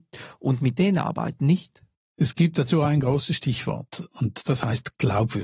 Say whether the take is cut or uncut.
uncut